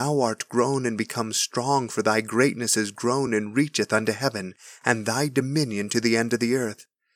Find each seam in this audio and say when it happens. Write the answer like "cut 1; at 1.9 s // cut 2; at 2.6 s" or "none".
none